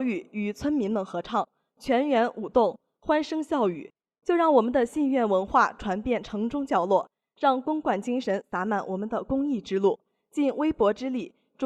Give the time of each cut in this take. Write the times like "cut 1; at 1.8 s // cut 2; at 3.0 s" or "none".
none

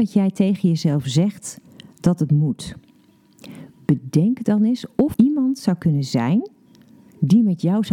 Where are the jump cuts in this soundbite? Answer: cut 1; at 5.1 s

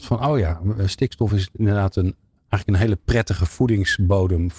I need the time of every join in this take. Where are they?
none

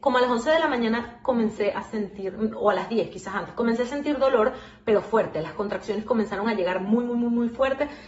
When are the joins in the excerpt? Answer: none

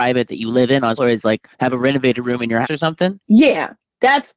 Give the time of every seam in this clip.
cut 1; at 1.0 s // cut 2; at 1.5 s // cut 3; at 2.6 s // cut 4; at 3.2 s

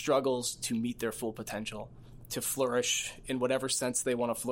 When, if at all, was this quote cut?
none

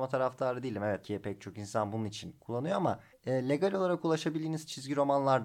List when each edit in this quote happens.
cut 1; at 1.0 s // cut 2; at 3.1 s

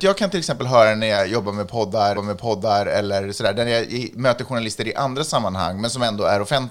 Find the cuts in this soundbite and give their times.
cut 1; at 2.1 s

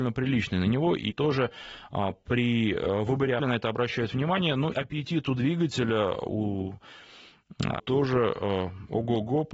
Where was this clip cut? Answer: cut 1; at 1.1 s // cut 2; at 3.4 s // cut 3; at 4.7 s // cut 4; at 7.8 s

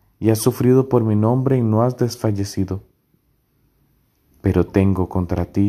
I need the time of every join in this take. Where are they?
none

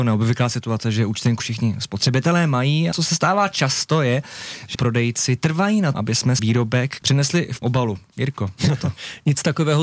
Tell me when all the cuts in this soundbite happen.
cut 1; at 1.4 s // cut 2; at 2.9 s // cut 3; at 4.7 s // cut 4; at 5.9 s // cut 5; at 6.4 s // cut 6; at 7.0 s // cut 7; at 7.6 s // cut 8; at 8.6 s

